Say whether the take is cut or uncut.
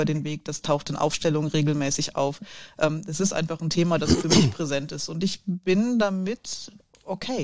uncut